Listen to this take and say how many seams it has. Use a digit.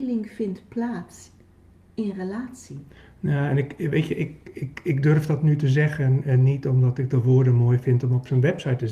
0